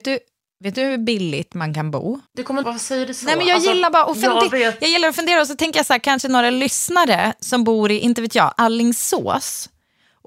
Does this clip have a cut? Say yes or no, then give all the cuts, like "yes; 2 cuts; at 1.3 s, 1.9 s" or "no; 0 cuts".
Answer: yes; 2 cuts; at 2.3 s, 2.6 s